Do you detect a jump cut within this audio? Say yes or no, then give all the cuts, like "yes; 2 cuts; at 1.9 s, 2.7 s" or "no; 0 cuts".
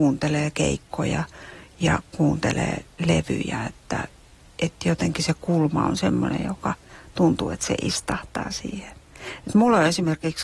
no; 0 cuts